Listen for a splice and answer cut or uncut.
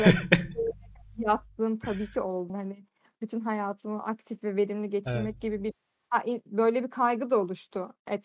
cut